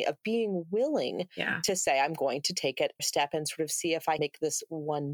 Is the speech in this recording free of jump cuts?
no; 2 cuts; at 3.0 s, 4.2 s

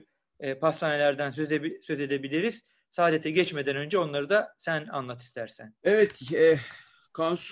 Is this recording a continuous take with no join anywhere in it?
yes; 0 cuts

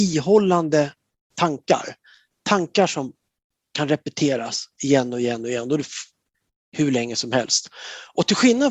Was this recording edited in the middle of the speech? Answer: no; 0 cuts

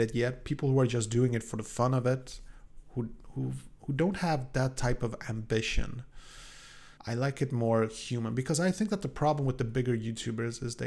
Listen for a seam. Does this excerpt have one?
yes; 1 cut; at 7.0 s

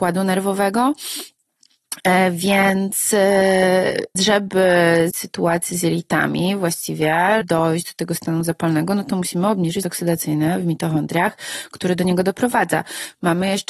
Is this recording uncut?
no; 4 cuts; at 4.2 s, 5.1 s, 7.4 s, 9.8 s

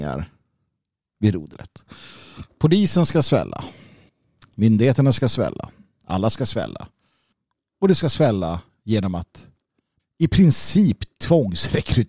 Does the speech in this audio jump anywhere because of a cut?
yes; 1 cut; at 10.0 s

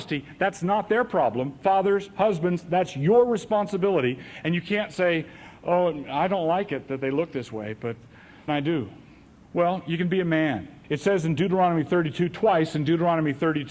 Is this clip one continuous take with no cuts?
no; 2 cuts; at 8.5 s, 10.8 s

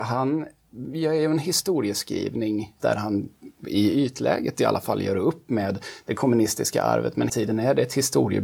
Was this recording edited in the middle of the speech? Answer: yes; 2 cuts; at 2.8 s, 7.3 s

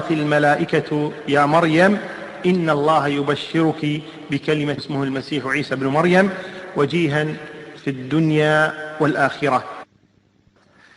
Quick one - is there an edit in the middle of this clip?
yes; 1 cut; at 4.8 s

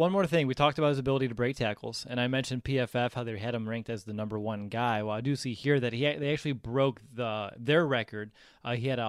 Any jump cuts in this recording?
no; 0 cuts

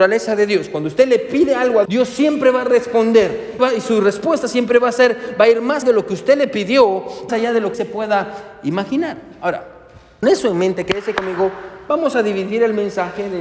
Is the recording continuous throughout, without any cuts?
no; 6 cuts; at 1.9 s, 3.6 s, 5.8 s, 7.3 s, 7.7 s, 10.2 s

